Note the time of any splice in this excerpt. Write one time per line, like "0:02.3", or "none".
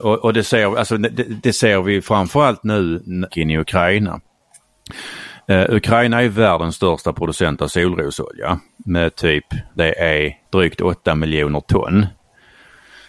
0:03.3
0:09.8
0:10.5